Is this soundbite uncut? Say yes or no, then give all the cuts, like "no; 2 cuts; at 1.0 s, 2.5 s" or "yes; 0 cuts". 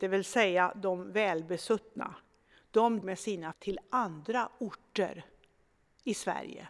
no; 2 cuts; at 3.0 s, 3.5 s